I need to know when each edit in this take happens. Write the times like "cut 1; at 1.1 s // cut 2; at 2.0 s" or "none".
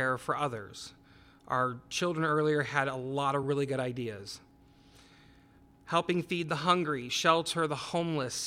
none